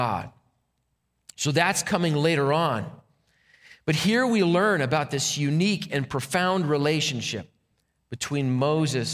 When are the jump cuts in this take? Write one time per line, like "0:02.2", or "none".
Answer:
none

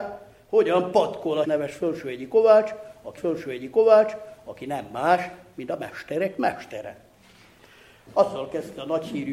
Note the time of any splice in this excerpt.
0:01.4
0:03.2

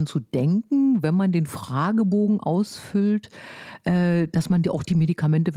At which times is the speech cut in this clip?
none

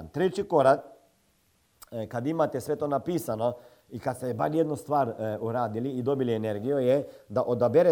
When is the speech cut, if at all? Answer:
none

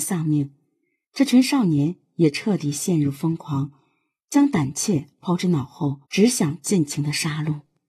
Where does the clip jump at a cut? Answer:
0:06.0

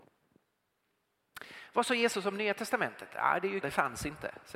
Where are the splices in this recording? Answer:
0:03.6

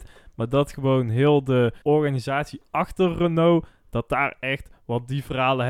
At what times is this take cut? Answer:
0:01.8

